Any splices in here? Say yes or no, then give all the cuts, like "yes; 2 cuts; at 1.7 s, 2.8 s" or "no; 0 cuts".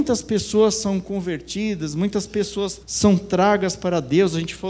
yes; 1 cut; at 2.8 s